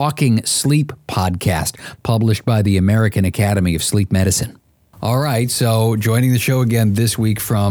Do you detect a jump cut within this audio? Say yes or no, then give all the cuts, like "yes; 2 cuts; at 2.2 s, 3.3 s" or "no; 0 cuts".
no; 0 cuts